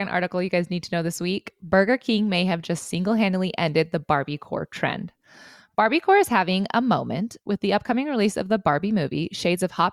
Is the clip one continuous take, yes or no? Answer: yes